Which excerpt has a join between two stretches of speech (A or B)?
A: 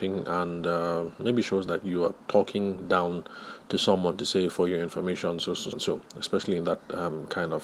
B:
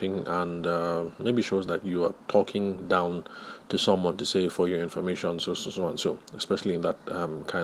A